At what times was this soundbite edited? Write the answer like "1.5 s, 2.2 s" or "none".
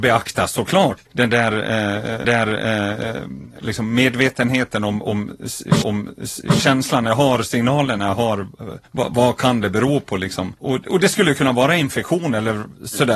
1.1 s, 2.2 s, 5.8 s, 8.9 s, 10.6 s